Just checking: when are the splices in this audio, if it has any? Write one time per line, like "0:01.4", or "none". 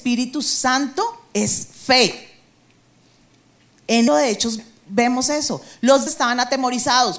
0:04.1
0:06.1